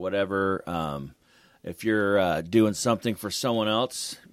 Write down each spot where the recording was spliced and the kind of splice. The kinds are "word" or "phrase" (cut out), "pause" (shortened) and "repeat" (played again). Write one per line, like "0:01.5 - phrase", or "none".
none